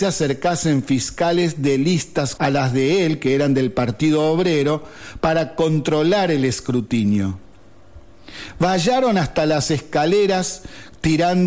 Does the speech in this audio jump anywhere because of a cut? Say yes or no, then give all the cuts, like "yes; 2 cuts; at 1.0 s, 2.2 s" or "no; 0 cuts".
yes; 1 cut; at 2.4 s